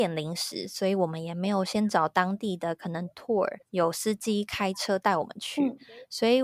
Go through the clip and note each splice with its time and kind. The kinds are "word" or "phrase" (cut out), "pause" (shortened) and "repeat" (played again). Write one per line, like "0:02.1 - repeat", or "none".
0:03.6 - pause